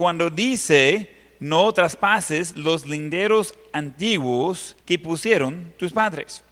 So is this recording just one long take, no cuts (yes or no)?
no